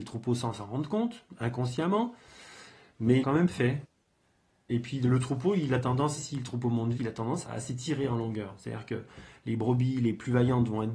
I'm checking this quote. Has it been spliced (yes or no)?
yes